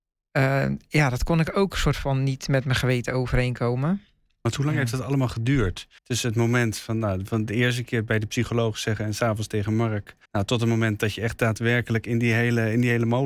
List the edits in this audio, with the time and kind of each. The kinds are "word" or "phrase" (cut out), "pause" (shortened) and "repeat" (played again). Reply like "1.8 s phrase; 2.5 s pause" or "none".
6.0 s pause; 10.2 s pause